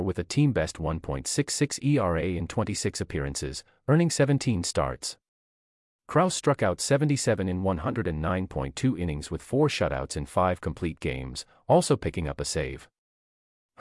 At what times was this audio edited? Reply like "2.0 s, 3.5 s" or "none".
none